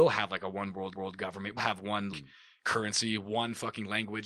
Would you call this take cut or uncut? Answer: cut